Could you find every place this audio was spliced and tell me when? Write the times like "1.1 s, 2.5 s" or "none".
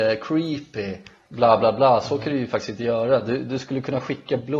none